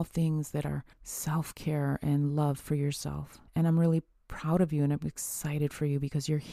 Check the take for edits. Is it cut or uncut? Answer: cut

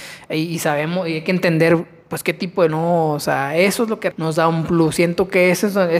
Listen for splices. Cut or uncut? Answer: cut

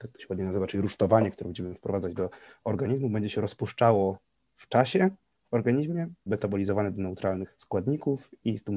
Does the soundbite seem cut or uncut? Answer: cut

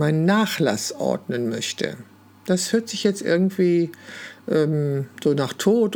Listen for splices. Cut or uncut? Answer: uncut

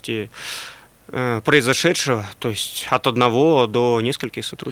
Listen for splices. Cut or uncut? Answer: uncut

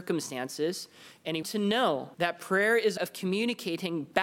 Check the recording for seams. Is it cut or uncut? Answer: cut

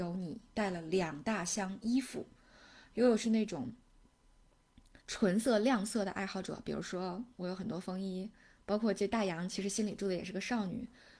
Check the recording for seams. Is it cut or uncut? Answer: cut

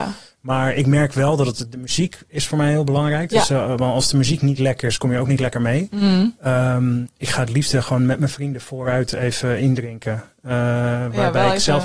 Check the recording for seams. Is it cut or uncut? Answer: uncut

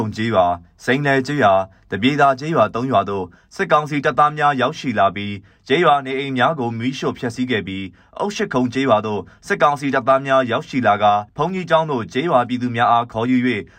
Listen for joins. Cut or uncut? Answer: cut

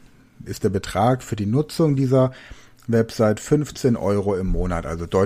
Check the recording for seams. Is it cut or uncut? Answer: uncut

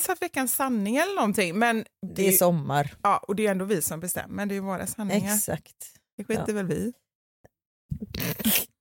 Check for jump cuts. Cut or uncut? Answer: uncut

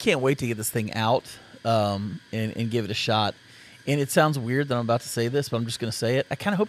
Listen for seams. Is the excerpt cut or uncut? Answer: uncut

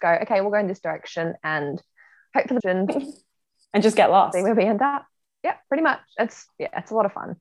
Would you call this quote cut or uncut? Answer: cut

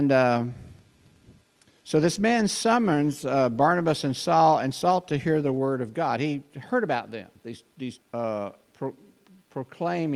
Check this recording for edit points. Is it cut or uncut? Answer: cut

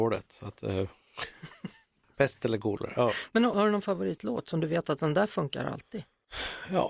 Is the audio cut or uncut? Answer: uncut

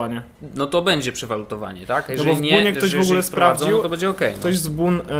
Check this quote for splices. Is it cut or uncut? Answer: uncut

